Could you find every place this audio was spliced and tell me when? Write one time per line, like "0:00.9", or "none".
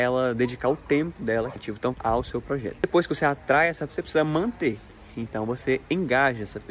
0:01.6
0:01.9
0:03.9